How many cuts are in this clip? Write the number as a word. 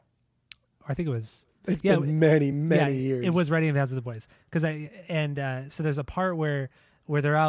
zero